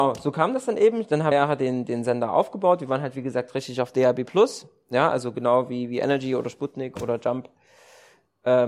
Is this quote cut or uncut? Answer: cut